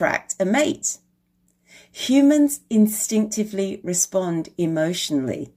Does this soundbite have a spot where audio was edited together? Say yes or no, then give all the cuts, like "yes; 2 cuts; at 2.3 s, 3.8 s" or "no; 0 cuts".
no; 0 cuts